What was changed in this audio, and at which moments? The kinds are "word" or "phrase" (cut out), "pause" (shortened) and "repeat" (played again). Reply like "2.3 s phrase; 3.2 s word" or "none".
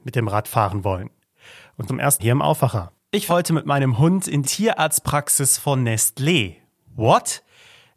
1.9 s word; 2.2 s word; 3.3 s word; 4.4 s word